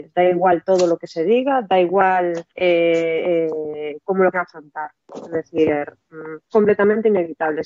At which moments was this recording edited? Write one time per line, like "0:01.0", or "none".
0:02.5
0:04.3
0:06.5